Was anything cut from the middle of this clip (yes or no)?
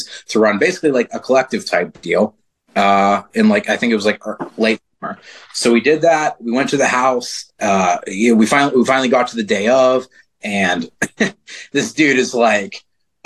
yes